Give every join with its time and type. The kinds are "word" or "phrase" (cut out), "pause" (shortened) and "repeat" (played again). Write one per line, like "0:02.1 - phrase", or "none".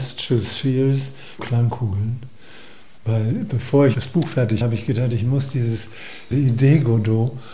0:01.4 - word
0:03.9 - word
0:04.6 - word
0:06.3 - word